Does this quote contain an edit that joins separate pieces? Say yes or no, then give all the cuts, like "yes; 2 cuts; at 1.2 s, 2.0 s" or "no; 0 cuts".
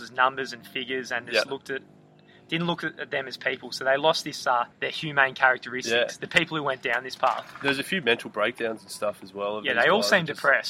yes; 1 cut; at 4.7 s